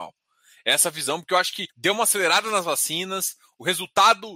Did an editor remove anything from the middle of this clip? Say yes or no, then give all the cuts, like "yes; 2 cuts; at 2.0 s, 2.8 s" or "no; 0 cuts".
yes; 1 cut; at 1.7 s